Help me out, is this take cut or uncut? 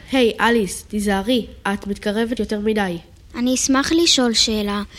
cut